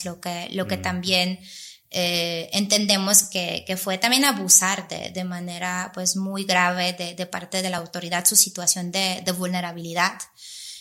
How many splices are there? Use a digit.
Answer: 0